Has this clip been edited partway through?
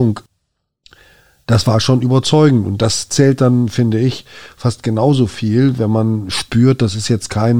no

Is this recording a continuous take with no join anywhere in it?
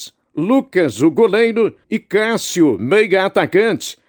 no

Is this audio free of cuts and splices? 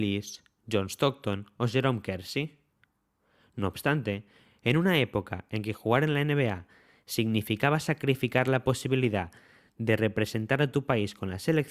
yes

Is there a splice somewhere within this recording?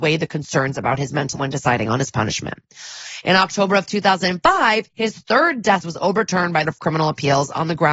yes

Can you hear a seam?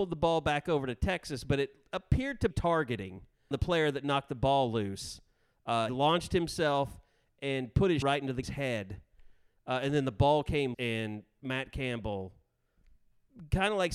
yes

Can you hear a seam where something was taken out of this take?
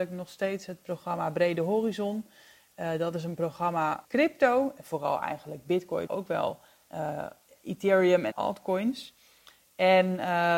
yes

